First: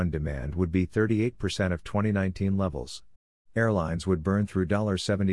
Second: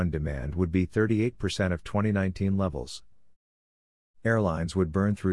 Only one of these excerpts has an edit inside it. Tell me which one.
first; 1 cut; at 3.2 s

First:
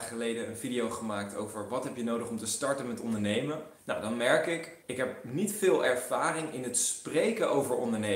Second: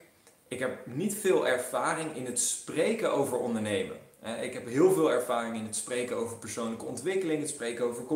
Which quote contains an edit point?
first; 2 cuts; at 3.7 s, 4.8 s

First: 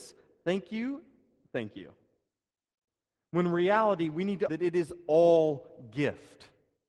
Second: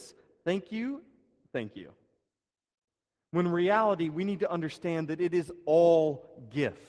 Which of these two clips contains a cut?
first; 1 cut; at 4.5 s

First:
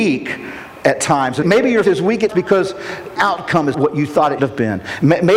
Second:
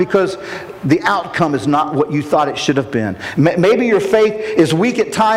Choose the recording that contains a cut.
first; 6 cuts; at 1.4 s, 1.8 s, 2.3 s, 3.2 s, 3.7 s, 4.4 s

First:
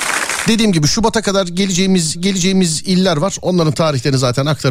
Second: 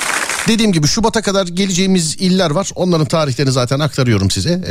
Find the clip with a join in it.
first; 1 cut; at 2.1 s

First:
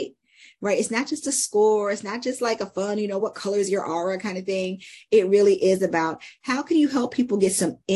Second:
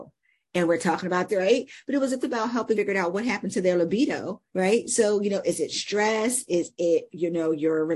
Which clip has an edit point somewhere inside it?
second; 4 cuts; at 1.3 s, 2.2 s, 2.7 s, 4.5 s

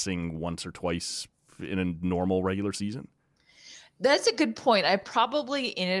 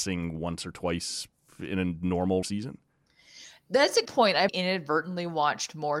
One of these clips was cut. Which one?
second; 3 cuts; at 2.4 s, 4.1 s, 4.5 s

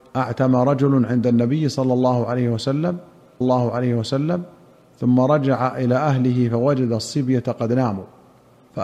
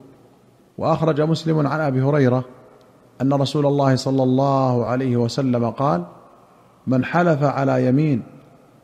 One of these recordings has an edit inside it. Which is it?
first; 1 cut; at 3.4 s

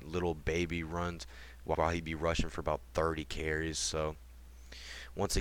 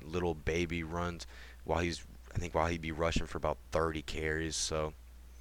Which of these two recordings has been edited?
first; 1 cut; at 1.7 s

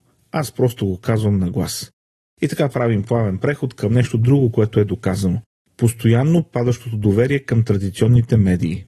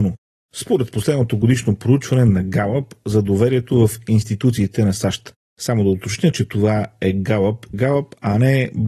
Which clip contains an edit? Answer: second; 1 cut; at 7.7 s

